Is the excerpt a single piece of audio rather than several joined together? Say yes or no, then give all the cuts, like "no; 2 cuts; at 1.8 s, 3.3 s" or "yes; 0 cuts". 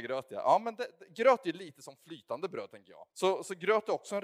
no; 1 cut; at 3.1 s